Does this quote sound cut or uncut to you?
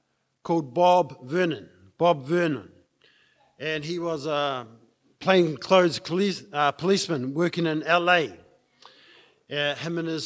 uncut